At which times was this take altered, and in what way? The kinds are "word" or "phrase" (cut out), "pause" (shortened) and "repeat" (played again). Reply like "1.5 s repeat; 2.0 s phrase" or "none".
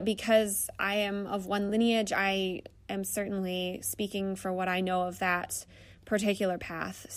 none